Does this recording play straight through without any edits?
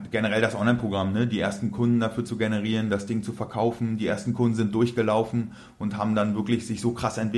yes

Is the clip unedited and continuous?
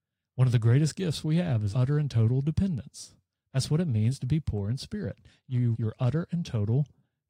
no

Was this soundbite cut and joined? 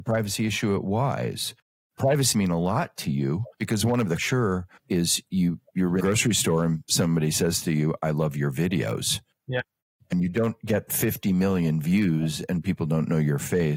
yes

